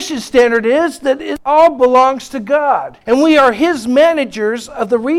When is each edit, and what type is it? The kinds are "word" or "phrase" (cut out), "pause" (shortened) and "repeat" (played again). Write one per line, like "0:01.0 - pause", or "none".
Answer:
0:03.0 - pause

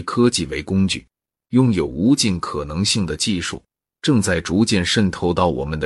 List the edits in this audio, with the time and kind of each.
none

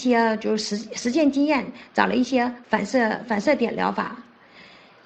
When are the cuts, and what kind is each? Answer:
none

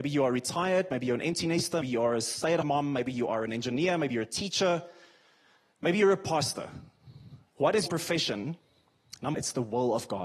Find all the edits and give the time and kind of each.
0:01.8 - word
0:02.6 - word
0:07.9 - word
0:09.3 - word

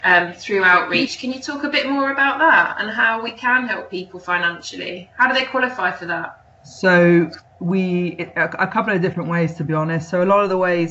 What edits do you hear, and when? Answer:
0:07.5 - pause

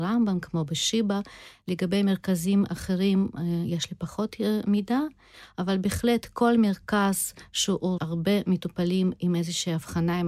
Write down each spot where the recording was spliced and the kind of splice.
0:08.0 - word

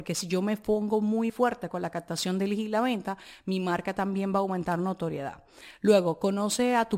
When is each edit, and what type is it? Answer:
0:01.3 - word

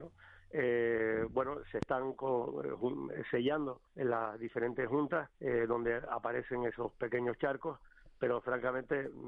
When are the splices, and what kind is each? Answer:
0:03.9 - pause
0:05.3 - pause

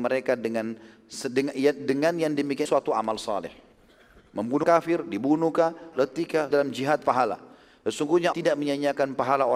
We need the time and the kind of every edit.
0:02.7 - word
0:04.6 - word
0:05.9 - word
0:06.5 - word
0:08.3 - word

